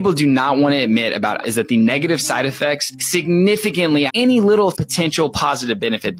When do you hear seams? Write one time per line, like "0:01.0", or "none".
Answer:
0:01.4
0:04.1
0:04.7